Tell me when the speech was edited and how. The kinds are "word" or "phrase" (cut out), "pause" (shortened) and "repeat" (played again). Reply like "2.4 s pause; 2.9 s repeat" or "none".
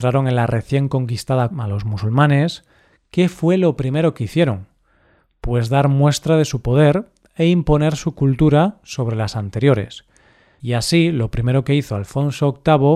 1.5 s word